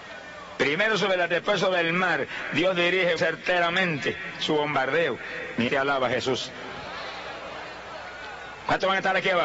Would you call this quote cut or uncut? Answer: cut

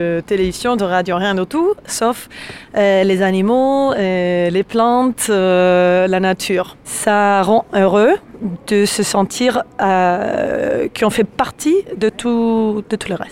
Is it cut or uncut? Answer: uncut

